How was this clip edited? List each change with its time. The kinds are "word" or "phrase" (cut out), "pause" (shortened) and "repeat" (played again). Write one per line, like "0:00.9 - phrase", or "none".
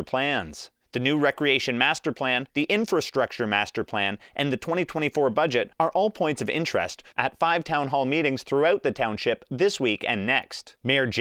0:02.5 - pause
0:05.7 - pause